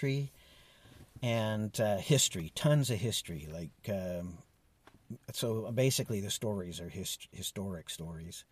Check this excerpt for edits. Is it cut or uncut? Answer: uncut